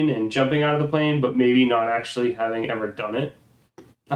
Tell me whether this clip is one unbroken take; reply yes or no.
yes